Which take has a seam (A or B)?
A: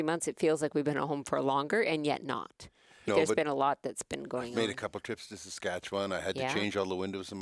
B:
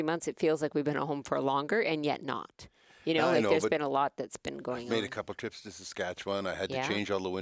A